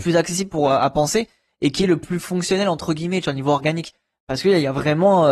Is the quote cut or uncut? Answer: uncut